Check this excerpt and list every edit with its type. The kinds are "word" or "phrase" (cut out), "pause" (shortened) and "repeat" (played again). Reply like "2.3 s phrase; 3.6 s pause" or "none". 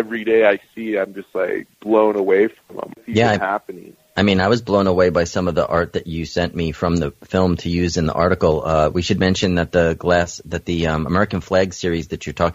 1.7 s pause